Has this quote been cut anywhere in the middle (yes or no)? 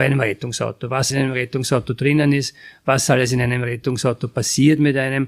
yes